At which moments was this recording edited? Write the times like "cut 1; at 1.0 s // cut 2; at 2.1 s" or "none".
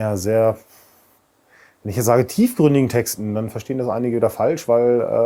cut 1; at 1.2 s